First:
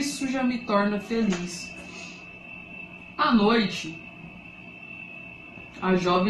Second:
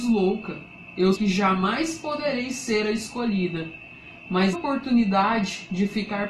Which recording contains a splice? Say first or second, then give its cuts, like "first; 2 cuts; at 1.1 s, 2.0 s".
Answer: second; 2 cuts; at 1.1 s, 4.5 s